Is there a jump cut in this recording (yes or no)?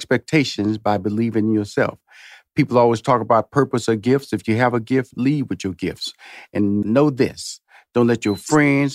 yes